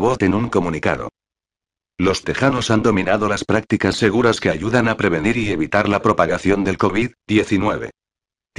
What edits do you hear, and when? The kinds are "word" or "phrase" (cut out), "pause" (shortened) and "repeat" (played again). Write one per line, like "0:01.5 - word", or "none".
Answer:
none